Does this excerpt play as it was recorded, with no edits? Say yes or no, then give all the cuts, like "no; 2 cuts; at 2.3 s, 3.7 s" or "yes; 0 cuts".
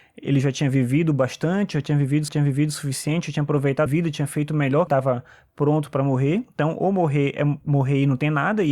no; 3 cuts; at 2.3 s, 3.9 s, 4.9 s